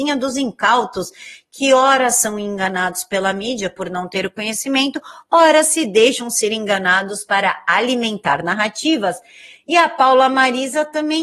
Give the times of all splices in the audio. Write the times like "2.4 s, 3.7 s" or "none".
none